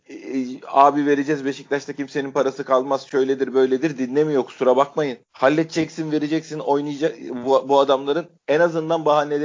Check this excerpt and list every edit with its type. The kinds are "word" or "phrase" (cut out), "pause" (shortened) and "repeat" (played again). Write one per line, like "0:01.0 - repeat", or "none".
0:05.2 - pause
0:08.4 - pause

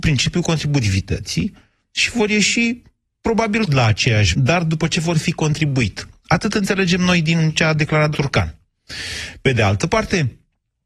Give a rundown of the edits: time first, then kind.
0:03.7 - word
0:04.3 - word
0:08.1 - word

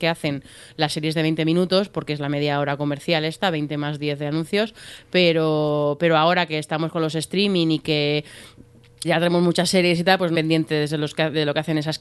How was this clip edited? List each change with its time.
0:09.0 - phrase
0:10.3 - phrase

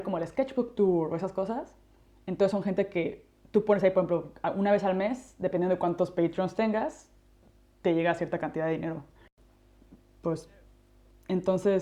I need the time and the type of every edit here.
none

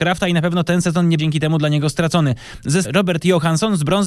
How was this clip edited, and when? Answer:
0:01.2 - word
0:02.8 - word

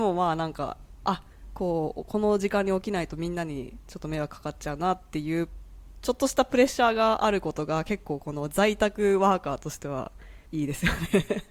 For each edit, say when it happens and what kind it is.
0:10.5 - pause

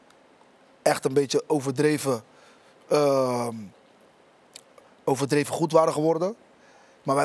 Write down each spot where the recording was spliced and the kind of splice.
none

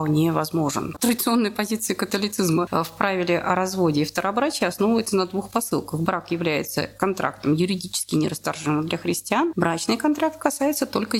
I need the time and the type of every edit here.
none

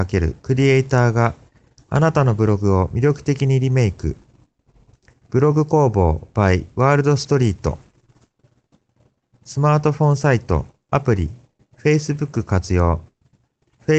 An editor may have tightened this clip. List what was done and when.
none

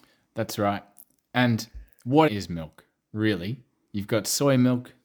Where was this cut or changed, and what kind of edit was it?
0:02.3 - word

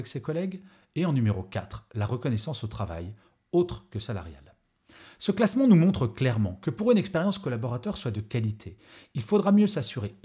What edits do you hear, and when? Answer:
none

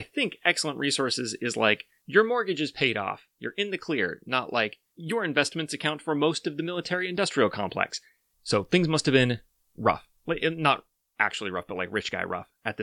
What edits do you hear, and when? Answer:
none

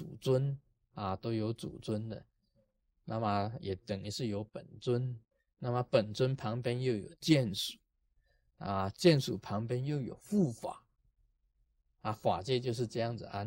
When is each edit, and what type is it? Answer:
none

